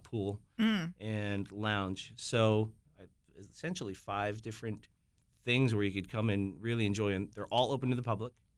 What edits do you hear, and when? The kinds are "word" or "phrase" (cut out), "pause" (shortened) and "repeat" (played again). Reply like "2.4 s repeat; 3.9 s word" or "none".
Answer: none